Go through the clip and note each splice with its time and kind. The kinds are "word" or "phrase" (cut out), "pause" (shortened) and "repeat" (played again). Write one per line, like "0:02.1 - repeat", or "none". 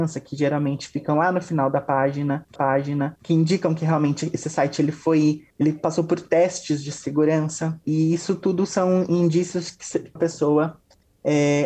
0:02.6 - repeat
0:05.5 - pause
0:07.8 - word
0:10.2 - phrase